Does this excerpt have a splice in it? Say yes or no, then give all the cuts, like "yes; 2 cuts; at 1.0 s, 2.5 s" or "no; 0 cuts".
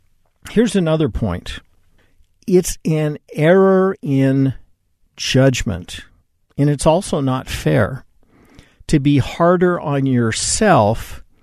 no; 0 cuts